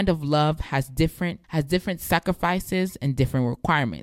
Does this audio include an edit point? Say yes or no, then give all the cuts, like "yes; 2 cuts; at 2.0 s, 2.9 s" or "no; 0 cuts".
yes; 1 cut; at 1.4 s